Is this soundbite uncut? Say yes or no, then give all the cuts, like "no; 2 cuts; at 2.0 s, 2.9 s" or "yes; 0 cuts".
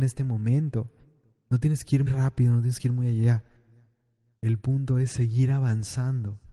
no; 1 cut; at 2.1 s